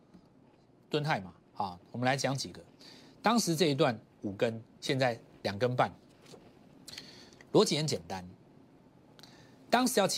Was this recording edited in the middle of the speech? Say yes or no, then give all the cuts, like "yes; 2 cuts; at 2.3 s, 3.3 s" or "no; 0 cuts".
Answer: no; 0 cuts